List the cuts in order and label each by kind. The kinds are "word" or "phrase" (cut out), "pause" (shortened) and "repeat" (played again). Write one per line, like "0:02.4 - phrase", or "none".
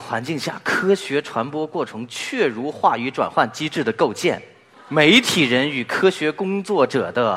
0:04.7 - pause

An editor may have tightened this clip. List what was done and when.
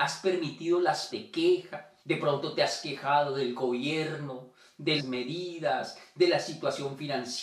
0:01.1 - word
0:02.0 - pause
0:05.0 - word

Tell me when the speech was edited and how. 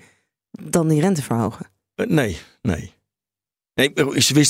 none

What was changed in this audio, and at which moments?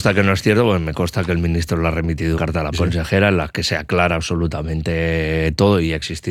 0:02.4 - word
0:02.7 - word

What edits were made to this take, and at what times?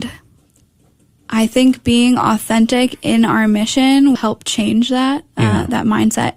0:04.2 - word

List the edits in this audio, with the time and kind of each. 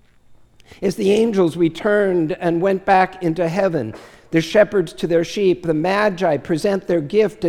none

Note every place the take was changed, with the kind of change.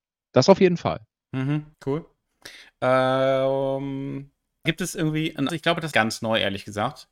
0:01.7 - pause
0:04.7 - word
0:05.5 - word
0:05.9 - word

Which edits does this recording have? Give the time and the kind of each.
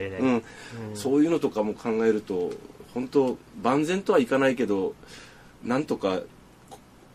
none

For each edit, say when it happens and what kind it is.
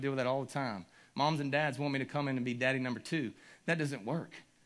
none

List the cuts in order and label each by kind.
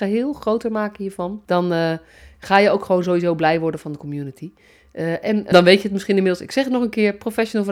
0:01.5 - pause
0:05.5 - phrase

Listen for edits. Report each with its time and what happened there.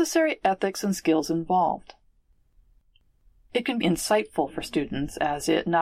0:03.8 - word

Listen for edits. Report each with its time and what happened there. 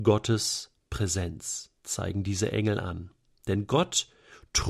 0:01.8 - pause

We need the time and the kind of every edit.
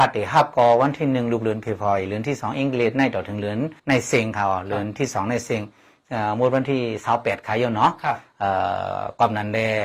0:03.8 - pause

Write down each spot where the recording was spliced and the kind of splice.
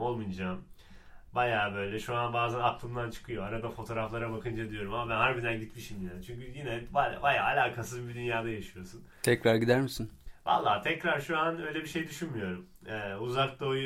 none

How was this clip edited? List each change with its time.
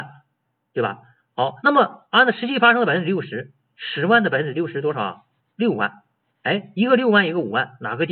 0:01.6 - pause

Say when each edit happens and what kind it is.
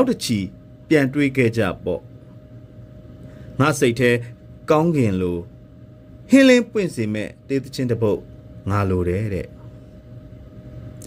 0:06.2 - pause

